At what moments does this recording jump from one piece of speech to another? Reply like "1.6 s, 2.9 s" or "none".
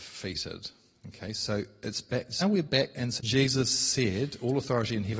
2.4 s, 3.2 s